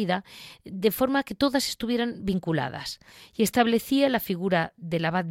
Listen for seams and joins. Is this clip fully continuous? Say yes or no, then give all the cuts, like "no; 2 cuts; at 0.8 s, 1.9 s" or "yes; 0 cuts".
yes; 0 cuts